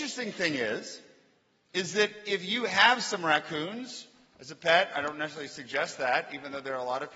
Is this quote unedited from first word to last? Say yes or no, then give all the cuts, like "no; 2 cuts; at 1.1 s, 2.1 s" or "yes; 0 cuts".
yes; 0 cuts